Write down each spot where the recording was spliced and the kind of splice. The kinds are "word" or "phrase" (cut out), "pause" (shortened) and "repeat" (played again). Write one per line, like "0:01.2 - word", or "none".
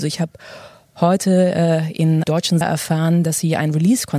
0:02.2 - word
0:02.6 - word